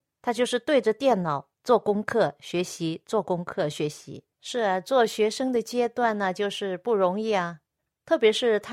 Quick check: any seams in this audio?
yes; 2 cuts; at 1.5 s, 4.3 s

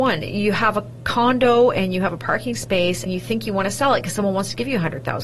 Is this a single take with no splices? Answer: no; 1 cut; at 3.1 s

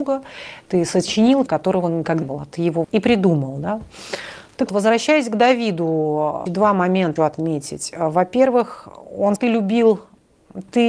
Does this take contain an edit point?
yes; 7 cuts; at 1.5 s, 2.2 s, 2.8 s, 4.7 s, 6.5 s, 7.2 s, 9.4 s

